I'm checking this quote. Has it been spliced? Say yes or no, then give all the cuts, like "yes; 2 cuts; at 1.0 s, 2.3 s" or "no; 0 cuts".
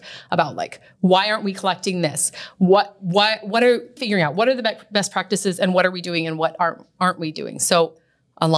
yes; 1 cut; at 4.0 s